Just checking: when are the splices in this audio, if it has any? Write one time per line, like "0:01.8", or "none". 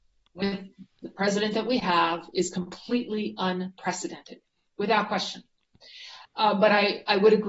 0:00.9
0:06.2